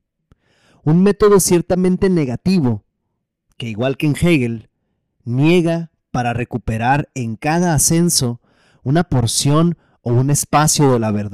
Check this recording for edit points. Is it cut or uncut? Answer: uncut